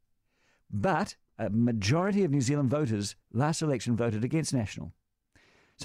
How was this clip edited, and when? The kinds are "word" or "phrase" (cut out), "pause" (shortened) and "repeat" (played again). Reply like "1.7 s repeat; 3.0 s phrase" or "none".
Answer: 1.3 s pause; 3.2 s pause